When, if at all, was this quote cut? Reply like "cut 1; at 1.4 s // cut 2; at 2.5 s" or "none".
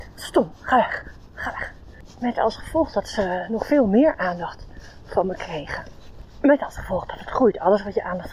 none